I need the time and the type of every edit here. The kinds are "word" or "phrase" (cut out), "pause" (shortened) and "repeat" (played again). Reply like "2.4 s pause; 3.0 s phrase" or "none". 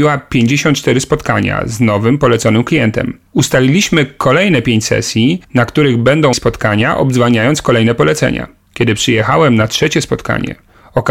3.3 s pause; 5.4 s pause; 6.3 s word; 8.7 s pause